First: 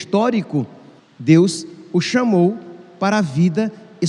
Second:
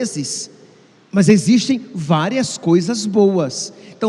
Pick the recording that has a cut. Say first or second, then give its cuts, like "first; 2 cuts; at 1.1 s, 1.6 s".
first; 1 cut; at 1.0 s